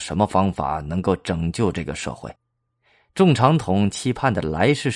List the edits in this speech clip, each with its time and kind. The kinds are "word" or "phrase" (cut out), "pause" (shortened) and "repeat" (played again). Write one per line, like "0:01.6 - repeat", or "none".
0:02.4 - pause